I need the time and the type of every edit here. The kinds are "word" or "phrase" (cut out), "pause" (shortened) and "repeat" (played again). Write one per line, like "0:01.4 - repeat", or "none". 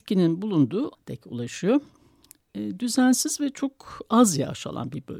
0:00.9 - word